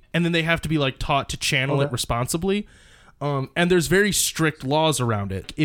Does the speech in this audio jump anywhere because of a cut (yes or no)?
no